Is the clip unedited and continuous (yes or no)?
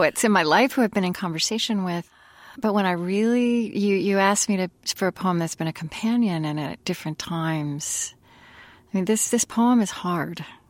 yes